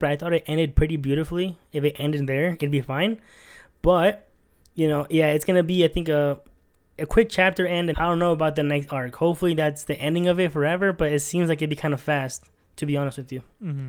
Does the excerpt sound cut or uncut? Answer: cut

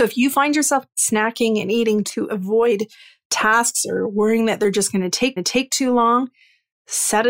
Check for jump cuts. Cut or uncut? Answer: cut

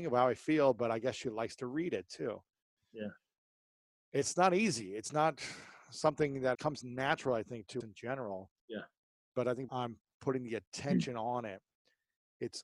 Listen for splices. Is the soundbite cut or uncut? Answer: cut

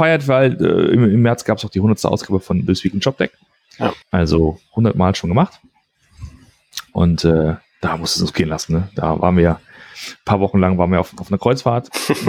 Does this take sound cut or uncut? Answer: cut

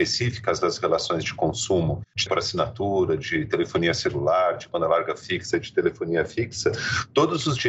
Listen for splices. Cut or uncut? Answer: cut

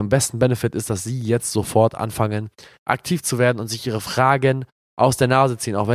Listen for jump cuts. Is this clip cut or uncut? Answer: uncut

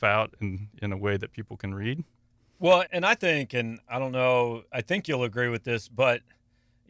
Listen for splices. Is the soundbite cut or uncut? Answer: cut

